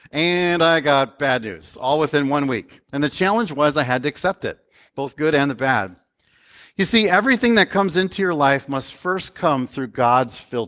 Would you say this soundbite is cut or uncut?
uncut